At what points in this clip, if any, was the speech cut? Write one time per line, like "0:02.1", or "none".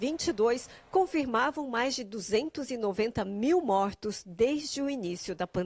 none